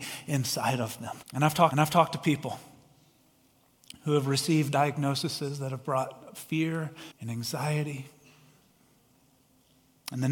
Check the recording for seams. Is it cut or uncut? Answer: cut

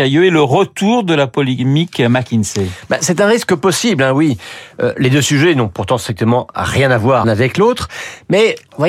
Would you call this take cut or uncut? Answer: cut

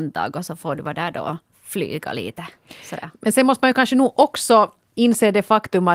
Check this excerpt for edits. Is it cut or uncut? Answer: cut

